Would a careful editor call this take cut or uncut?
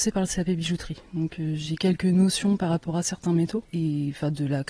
cut